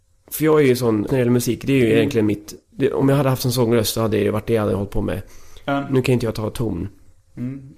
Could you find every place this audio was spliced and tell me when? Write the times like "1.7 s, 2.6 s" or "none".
1.1 s, 2.6 s

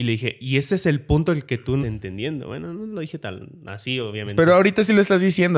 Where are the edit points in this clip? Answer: 1.8 s

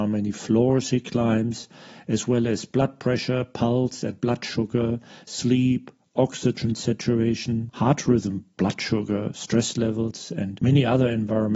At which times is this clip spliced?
none

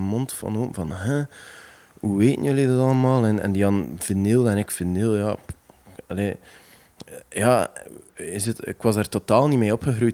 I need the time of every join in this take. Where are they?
none

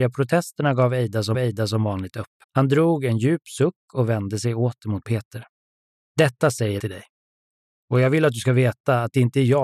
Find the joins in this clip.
1.3 s, 2.4 s, 5.8 s, 6.8 s

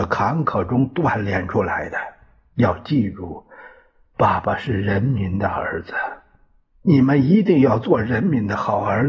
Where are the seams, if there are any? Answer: none

